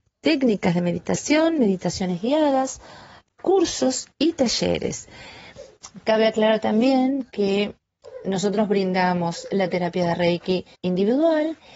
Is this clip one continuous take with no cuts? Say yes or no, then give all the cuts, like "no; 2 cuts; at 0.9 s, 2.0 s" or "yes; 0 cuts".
no; 2 cuts; at 4.1 s, 10.7 s